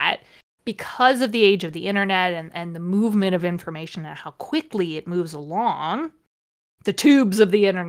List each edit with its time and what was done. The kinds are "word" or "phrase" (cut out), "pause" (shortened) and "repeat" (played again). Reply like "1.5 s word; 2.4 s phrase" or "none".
none